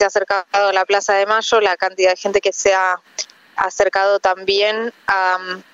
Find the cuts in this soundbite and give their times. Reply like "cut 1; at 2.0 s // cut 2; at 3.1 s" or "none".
cut 1; at 3.6 s